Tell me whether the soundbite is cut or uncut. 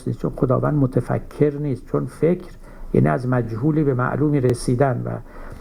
uncut